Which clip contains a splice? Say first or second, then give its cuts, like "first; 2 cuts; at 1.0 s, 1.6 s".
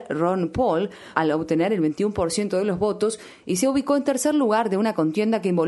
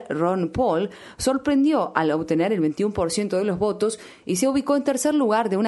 first; 1 cut; at 1.1 s